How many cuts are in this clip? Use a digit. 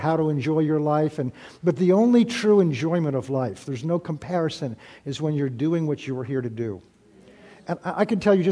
0